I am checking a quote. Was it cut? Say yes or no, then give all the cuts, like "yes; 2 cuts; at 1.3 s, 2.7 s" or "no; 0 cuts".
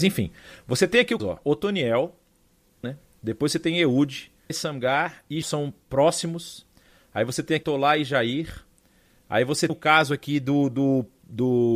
yes; 6 cuts; at 1.2 s, 2.8 s, 4.5 s, 5.4 s, 7.6 s, 9.7 s